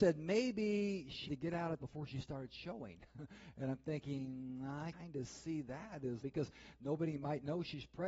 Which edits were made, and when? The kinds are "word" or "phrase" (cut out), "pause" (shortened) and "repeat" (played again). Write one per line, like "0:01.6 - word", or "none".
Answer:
0:01.3 - word
0:01.8 - word
0:04.9 - word
0:06.2 - word